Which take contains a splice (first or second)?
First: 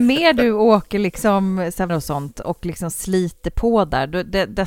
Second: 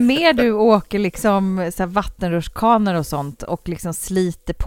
first